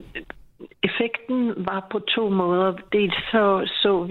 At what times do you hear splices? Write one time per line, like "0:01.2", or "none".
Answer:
none